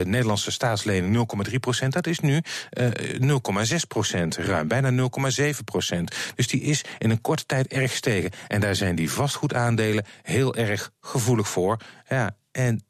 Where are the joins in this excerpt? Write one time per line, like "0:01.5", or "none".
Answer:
none